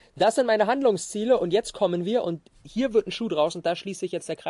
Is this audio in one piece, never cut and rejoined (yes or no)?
yes